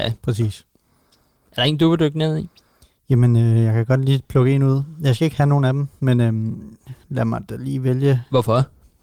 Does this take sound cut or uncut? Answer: uncut